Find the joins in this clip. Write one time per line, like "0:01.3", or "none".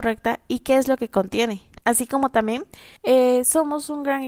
0:01.8
0:03.0